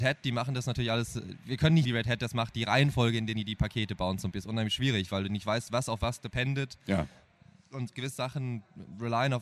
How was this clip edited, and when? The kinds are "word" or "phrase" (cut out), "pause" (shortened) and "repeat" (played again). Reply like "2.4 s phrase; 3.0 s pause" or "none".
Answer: 1.8 s word; 4.3 s word